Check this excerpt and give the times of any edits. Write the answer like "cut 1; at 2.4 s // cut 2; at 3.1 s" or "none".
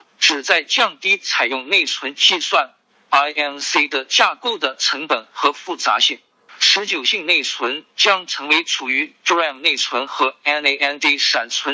none